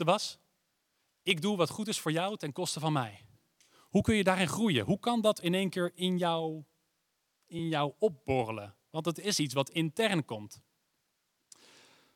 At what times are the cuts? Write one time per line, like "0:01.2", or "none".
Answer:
none